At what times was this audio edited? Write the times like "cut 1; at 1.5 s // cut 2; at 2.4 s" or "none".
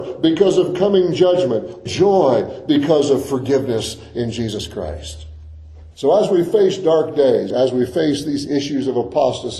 cut 1; at 1.9 s // cut 2; at 5.9 s // cut 3; at 7.5 s